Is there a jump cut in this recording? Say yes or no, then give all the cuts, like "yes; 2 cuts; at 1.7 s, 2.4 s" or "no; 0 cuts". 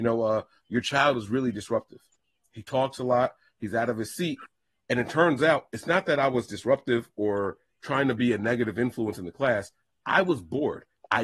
no; 0 cuts